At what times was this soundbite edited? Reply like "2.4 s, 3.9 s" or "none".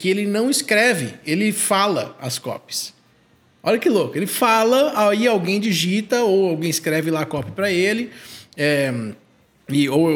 none